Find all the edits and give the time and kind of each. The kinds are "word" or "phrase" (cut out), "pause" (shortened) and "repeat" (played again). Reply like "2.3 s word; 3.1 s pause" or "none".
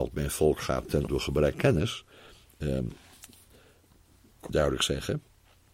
1.1 s word; 1.5 s word; 4.5 s word